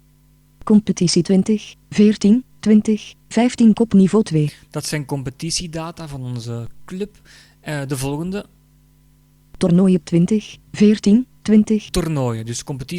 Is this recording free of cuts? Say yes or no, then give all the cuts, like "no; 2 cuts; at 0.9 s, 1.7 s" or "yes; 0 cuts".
yes; 0 cuts